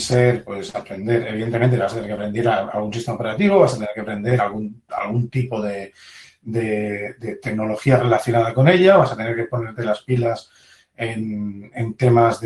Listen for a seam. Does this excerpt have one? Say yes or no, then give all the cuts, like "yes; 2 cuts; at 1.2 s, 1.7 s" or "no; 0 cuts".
no; 0 cuts